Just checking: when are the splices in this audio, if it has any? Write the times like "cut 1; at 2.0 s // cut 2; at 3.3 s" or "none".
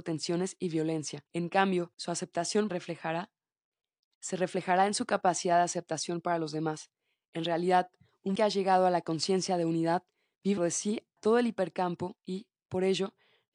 cut 1; at 1.3 s // cut 2; at 1.9 s // cut 3; at 2.7 s // cut 4; at 8.4 s // cut 5; at 10.6 s // cut 6; at 11.2 s